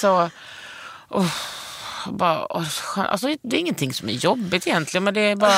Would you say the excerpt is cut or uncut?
uncut